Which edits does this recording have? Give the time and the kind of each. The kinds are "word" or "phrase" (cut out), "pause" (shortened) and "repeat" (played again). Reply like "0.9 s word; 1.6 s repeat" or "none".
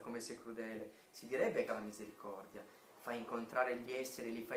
1.7 s phrase